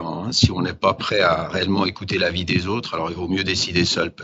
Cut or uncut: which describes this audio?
uncut